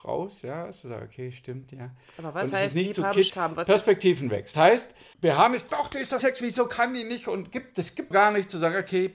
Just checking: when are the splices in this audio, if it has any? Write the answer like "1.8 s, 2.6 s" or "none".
3.3 s, 4.5 s, 5.1 s, 5.7 s, 6.2 s, 8.1 s